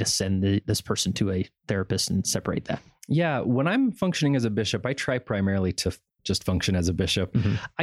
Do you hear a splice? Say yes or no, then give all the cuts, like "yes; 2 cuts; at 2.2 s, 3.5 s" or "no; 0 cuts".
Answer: no; 0 cuts